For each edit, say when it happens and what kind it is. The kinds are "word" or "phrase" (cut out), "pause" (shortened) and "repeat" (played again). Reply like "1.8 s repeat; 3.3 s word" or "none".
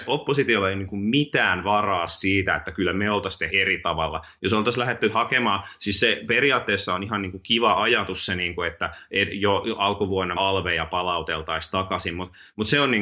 2.1 s word; 3.5 s word; 10.4 s word

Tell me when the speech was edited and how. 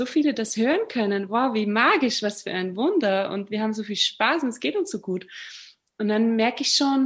none

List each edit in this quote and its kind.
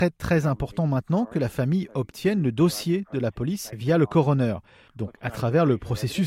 none

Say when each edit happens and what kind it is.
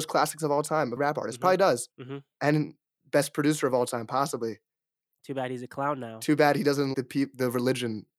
1.0 s phrase; 1.9 s pause; 6.9 s word

